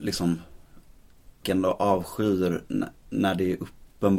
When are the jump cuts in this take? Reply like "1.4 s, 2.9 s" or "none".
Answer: 1.4 s

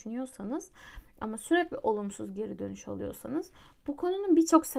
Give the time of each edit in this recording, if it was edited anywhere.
none

